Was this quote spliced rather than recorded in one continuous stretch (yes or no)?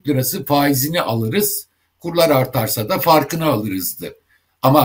no